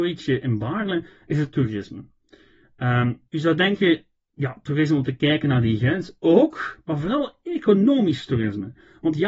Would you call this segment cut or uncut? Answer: cut